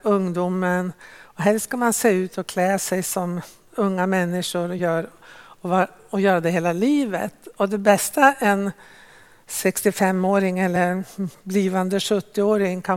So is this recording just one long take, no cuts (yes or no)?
yes